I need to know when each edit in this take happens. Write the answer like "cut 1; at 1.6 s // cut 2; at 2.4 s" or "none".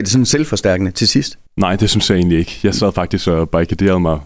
none